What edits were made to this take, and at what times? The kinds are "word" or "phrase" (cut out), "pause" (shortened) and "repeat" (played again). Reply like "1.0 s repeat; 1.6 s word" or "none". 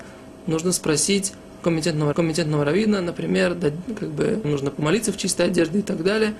2.1 s repeat; 4.4 s phrase